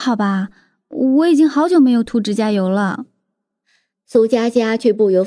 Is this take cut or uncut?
uncut